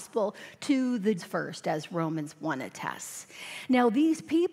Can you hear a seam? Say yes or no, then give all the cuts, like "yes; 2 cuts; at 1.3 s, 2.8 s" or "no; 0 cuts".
yes; 1 cut; at 1.2 s